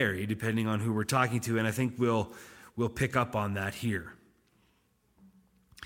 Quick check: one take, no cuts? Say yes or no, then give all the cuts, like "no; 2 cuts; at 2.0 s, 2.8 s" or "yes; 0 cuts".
yes; 0 cuts